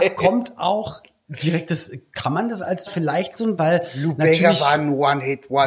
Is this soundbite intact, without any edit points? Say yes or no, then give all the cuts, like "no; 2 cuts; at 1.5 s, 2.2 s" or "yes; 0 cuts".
no; 2 cuts; at 2.9 s, 3.6 s